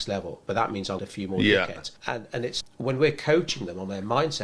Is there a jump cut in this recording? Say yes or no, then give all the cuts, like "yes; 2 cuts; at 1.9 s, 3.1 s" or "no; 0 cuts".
yes; 3 cuts; at 1.0 s, 2.0 s, 2.6 s